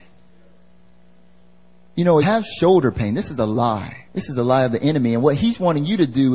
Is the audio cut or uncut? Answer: cut